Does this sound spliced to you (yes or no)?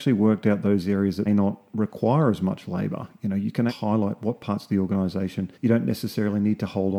yes